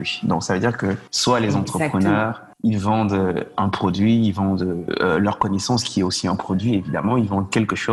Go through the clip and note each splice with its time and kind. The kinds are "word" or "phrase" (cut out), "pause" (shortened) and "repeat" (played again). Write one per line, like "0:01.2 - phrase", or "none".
0:01.1 - pause
0:02.5 - pause